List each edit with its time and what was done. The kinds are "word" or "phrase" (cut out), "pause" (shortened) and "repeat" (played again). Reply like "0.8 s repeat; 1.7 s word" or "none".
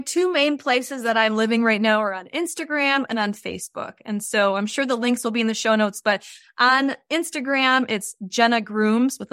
none